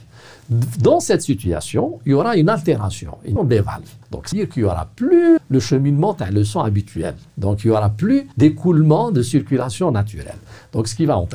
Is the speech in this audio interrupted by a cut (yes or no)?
yes